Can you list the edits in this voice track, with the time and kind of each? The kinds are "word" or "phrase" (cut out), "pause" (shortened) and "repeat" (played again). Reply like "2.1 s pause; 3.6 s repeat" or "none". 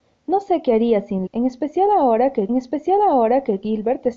1.3 s word; 2.5 s repeat